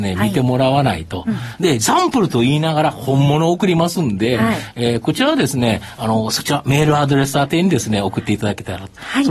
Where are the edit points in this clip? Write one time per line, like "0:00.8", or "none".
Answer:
none